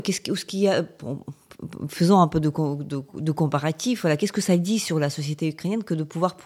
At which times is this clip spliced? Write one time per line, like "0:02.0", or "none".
none